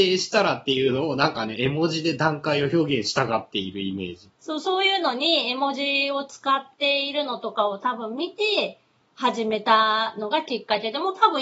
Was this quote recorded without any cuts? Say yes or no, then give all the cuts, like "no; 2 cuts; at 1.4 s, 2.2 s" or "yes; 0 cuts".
no; 1 cut; at 4.3 s